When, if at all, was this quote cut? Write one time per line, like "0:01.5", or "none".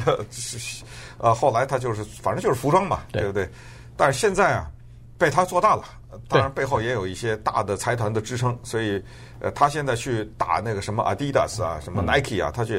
none